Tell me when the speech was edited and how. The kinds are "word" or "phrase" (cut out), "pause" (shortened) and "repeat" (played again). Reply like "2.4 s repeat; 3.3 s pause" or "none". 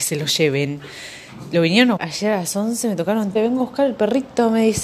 2.0 s word; 3.3 s word